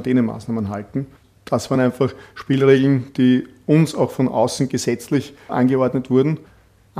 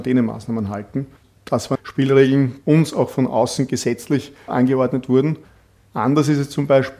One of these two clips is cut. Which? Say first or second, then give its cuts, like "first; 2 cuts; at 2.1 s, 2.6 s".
second; 2 cuts; at 1.7 s, 2.6 s